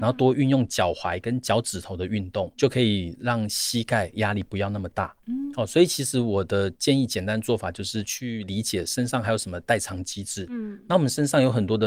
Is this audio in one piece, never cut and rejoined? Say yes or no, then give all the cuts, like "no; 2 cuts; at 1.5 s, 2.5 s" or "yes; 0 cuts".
yes; 0 cuts